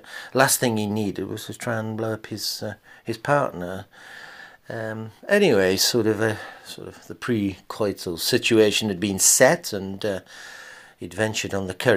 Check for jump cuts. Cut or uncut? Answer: uncut